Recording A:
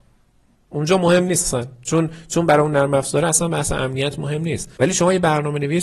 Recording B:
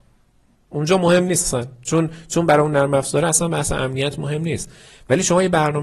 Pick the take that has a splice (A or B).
A